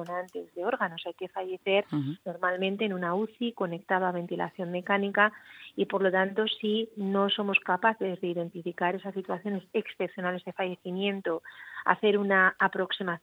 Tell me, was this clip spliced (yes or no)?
no